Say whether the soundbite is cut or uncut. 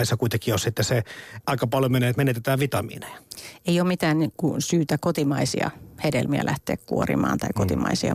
cut